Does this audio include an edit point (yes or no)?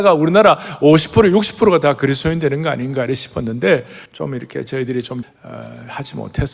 yes